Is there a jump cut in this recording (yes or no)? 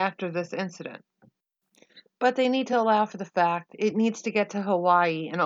no